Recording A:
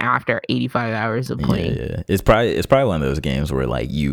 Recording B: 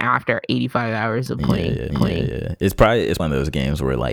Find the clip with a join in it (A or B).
B